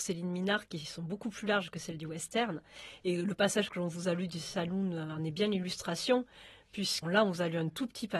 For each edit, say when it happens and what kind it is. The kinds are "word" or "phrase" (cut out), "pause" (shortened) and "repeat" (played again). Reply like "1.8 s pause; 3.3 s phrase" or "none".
7.0 s word